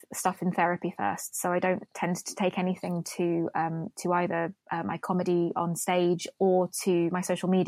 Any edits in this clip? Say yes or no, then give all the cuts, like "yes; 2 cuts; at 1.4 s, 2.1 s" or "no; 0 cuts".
yes; 1 cut; at 4.6 s